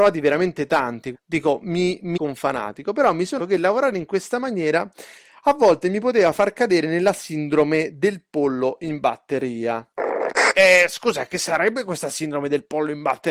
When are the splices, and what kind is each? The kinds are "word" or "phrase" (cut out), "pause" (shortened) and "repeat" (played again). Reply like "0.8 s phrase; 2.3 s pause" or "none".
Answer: 1.1 s word; 2.2 s word; 3.4 s word